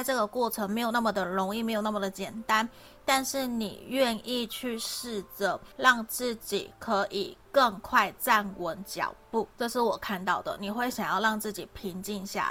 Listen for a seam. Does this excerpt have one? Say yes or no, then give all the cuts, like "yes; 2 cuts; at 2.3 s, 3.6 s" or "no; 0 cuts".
yes; 2 cuts; at 5.7 s, 9.5 s